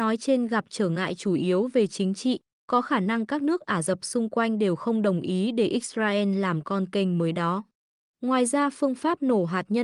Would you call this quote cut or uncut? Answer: uncut